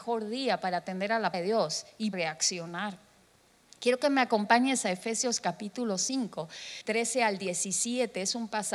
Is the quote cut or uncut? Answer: cut